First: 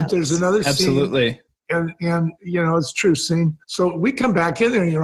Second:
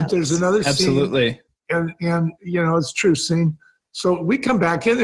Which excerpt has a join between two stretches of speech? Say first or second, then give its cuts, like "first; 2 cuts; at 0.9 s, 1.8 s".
first; 1 cut; at 3.6 s